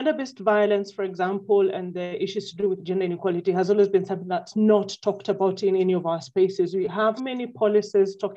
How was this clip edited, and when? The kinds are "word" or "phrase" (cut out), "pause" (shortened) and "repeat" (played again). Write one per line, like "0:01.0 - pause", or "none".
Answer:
0:07.2 - word